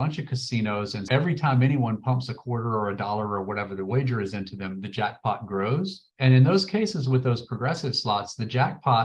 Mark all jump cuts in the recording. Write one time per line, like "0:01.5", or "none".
0:01.1
0:06.1